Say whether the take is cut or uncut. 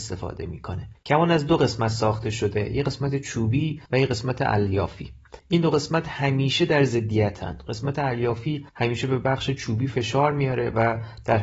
cut